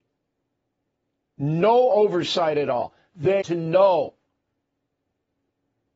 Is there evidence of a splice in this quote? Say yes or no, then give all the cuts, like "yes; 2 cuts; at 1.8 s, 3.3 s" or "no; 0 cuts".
yes; 1 cut; at 3.4 s